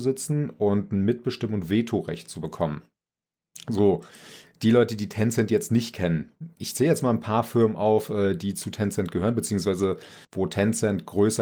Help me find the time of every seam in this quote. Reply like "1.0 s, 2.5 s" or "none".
10.2 s